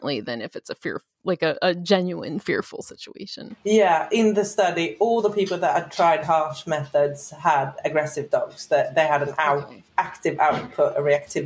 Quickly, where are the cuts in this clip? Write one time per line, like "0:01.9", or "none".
none